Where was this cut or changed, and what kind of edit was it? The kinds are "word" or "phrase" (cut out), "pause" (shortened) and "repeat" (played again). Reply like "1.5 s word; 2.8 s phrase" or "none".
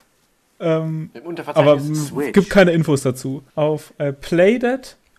3.5 s pause

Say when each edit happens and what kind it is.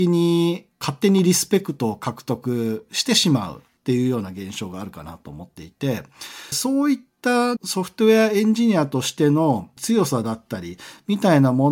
6.5 s word

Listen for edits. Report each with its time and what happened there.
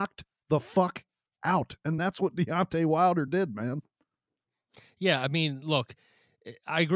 none

